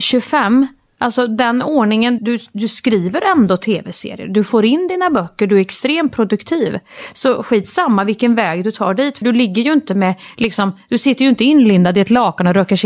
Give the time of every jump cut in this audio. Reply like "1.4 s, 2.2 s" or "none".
2.2 s, 9.2 s